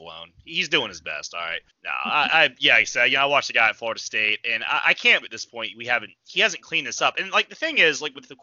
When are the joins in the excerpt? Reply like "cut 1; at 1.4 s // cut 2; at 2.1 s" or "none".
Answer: cut 1; at 1.7 s // cut 2; at 5.2 s